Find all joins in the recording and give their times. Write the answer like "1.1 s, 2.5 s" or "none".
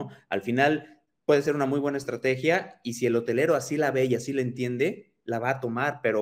none